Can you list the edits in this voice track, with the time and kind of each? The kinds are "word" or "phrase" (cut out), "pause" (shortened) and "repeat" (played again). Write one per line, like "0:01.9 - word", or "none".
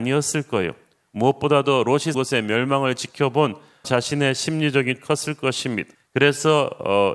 0:02.1 - word
0:03.8 - word
0:05.0 - word
0:05.9 - pause